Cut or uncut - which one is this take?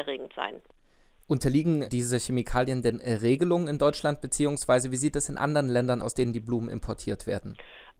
cut